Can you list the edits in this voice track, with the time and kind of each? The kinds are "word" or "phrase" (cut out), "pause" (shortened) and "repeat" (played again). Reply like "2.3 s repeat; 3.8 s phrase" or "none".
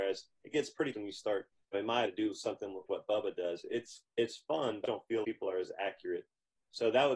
0.9 s word; 1.7 s phrase; 2.1 s phrase; 2.9 s word; 4.8 s phrase; 5.2 s word